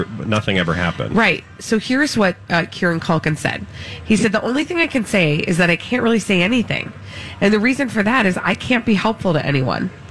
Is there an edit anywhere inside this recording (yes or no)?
no